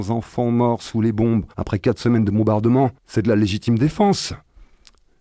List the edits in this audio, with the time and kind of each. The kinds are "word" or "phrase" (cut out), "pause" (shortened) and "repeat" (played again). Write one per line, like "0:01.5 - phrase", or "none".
0:01.5 - pause
0:03.0 - pause